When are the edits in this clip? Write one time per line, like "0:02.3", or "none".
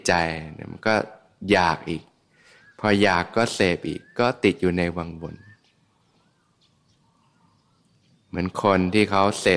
none